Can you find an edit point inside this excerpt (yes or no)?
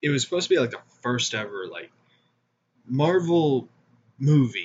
no